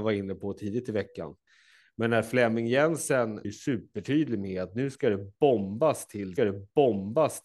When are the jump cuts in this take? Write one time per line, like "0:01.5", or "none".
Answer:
0:03.4
0:06.4